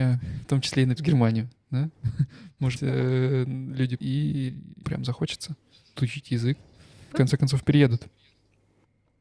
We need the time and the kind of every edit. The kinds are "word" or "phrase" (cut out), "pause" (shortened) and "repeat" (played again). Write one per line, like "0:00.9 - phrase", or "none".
0:01.0 - word
0:02.8 - word
0:04.0 - word
0:04.8 - word
0:06.0 - word
0:07.1 - word